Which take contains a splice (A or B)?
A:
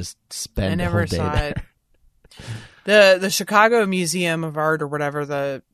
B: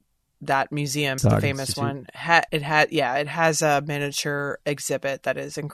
B